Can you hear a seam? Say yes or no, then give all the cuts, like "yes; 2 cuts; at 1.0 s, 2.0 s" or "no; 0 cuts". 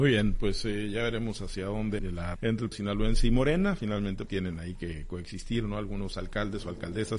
yes; 4 cuts; at 2.0 s, 2.4 s, 2.7 s, 4.3 s